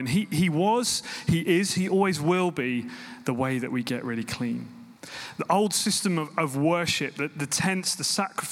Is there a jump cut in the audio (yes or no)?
yes